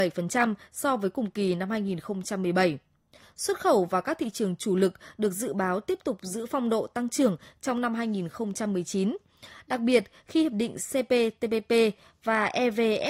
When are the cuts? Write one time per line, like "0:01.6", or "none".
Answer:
none